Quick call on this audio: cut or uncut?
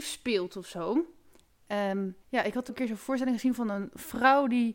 cut